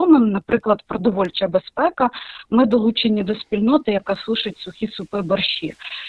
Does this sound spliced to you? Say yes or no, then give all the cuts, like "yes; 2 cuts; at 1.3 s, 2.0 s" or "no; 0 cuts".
no; 0 cuts